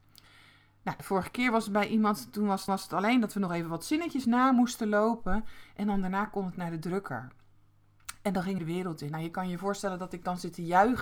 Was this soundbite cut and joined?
yes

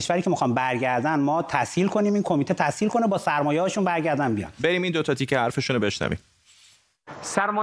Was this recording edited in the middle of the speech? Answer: no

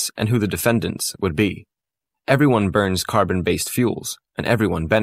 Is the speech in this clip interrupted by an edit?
no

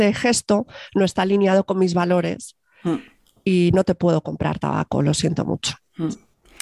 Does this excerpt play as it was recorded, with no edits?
yes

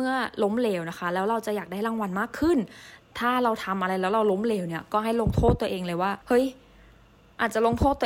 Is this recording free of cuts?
no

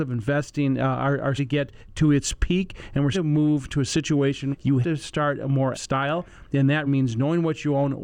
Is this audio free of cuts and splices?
no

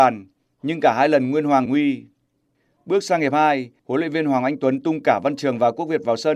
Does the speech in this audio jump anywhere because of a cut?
yes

